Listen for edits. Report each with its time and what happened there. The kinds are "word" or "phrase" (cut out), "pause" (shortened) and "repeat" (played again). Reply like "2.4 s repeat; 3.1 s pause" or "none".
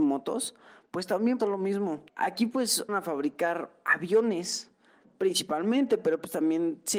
1.4 s word; 2.1 s pause; 2.9 s word